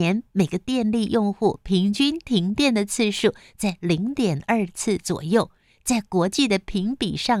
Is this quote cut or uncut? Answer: uncut